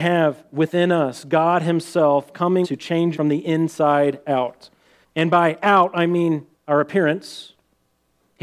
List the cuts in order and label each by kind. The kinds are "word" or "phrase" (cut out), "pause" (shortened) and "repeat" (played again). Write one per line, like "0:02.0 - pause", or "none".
0:02.6 - word
0:03.1 - word
0:05.0 - pause
0:06.5 - word